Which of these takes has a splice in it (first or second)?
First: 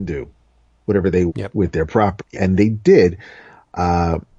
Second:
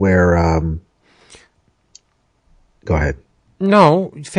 first